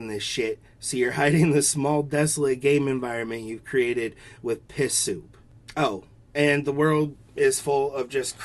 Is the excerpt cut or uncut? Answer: uncut